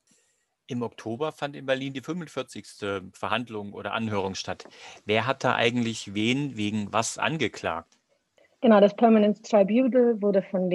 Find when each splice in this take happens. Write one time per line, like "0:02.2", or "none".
none